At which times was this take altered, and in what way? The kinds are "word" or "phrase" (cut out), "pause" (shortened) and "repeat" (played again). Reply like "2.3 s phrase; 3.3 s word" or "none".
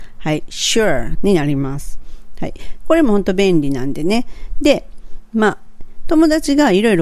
1.1 s word